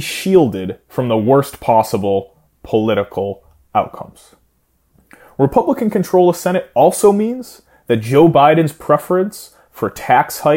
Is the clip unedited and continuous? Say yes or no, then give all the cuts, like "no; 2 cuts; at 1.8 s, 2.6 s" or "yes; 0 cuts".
yes; 0 cuts